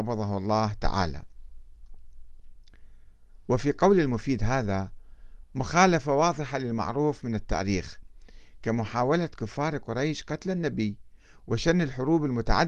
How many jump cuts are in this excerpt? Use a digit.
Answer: 0